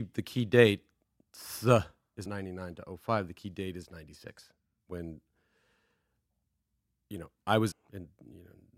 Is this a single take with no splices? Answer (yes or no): no